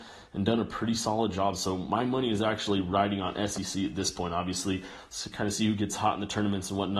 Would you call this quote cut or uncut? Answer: uncut